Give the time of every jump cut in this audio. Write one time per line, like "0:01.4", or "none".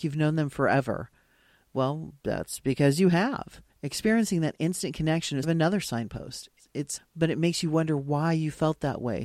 0:03.7
0:05.4
0:07.0